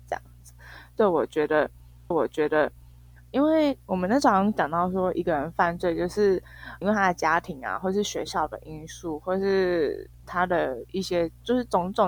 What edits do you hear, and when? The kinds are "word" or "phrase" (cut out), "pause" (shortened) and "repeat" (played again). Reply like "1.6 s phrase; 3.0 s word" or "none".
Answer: 2.1 s repeat; 6.8 s word